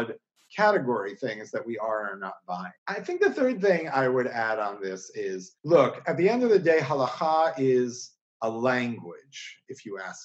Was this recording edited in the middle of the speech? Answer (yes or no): yes